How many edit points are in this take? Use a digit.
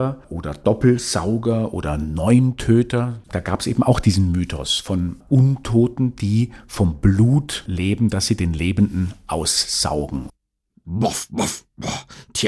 0